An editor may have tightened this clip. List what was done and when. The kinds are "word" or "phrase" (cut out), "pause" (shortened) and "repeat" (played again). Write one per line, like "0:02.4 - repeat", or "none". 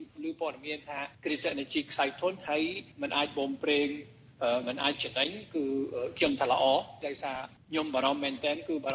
0:01.1 - pause
0:02.9 - pause